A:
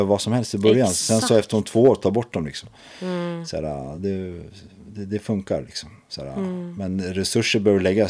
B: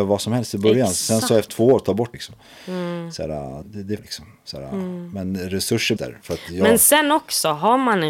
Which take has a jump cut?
B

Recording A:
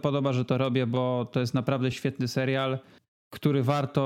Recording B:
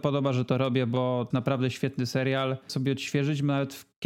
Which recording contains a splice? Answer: B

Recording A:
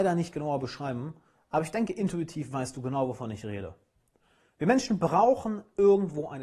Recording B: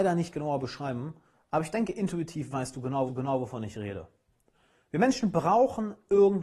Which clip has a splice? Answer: B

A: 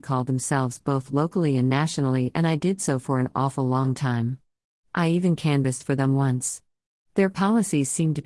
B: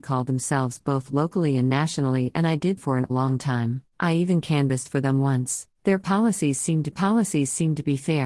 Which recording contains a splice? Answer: B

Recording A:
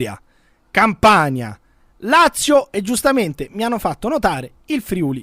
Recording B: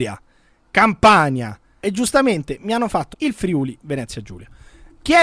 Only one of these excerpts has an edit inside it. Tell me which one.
B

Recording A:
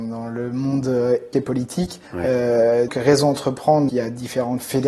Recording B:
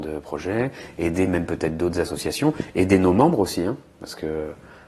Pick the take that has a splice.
A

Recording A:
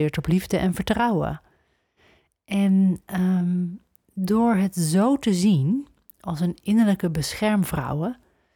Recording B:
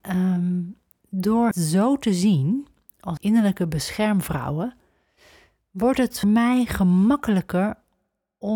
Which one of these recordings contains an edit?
B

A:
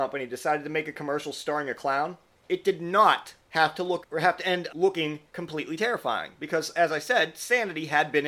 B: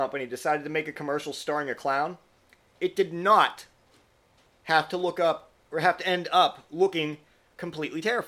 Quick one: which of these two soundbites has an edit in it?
A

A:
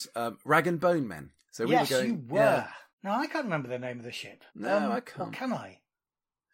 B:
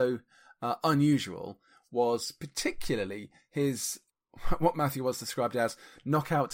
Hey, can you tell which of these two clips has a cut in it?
A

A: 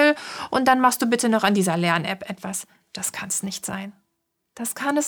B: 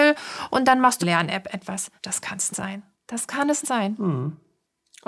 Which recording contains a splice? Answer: B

